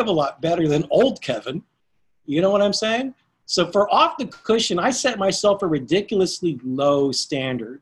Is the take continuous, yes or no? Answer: yes